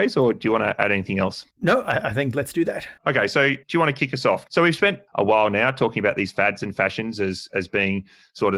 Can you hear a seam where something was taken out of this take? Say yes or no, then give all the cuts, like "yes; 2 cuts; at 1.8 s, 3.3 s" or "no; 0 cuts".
yes; 3 cuts; at 1.5 s, 3.0 s, 5.1 s